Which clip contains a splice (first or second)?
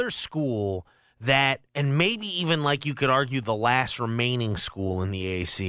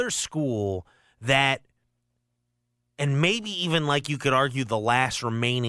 first